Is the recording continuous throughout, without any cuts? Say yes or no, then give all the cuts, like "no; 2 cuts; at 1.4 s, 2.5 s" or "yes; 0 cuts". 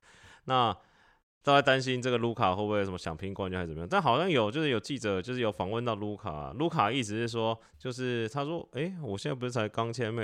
no; 1 cut; at 7.7 s